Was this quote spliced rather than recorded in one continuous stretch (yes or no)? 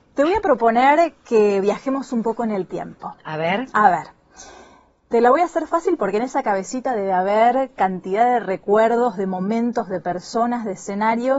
no